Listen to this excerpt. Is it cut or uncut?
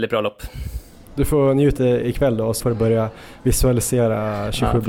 cut